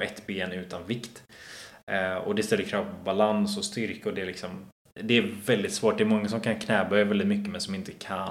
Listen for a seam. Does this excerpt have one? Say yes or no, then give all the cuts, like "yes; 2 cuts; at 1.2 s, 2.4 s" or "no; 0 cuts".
no; 0 cuts